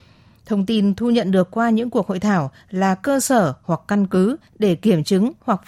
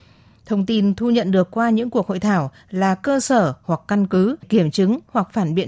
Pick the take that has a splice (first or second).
second